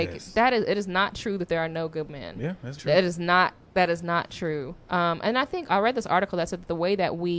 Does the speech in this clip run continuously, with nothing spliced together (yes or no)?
no